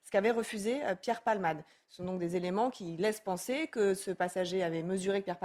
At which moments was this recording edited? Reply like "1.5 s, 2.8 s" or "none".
none